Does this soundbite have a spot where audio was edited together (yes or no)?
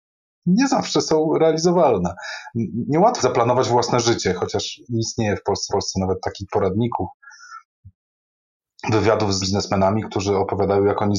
yes